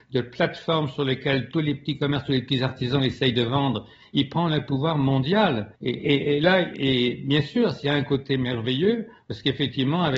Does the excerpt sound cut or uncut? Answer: cut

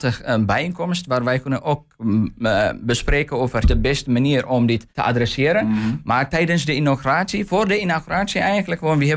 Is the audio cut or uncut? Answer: cut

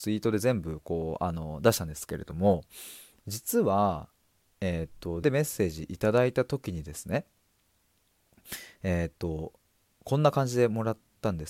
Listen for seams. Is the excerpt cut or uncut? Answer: cut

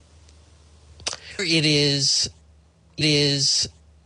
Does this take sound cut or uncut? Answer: cut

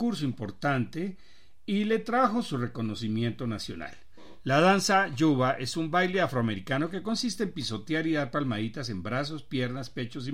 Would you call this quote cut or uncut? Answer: uncut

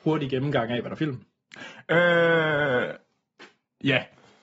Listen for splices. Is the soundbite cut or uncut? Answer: cut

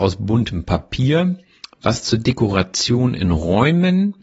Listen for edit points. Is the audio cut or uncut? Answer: uncut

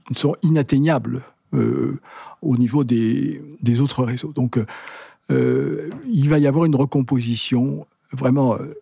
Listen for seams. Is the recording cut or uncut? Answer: uncut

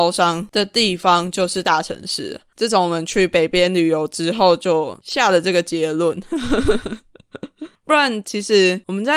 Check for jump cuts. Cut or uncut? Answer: uncut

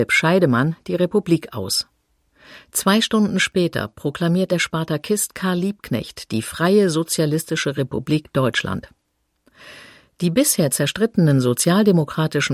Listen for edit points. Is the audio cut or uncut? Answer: uncut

